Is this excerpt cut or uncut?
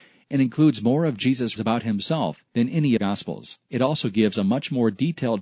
cut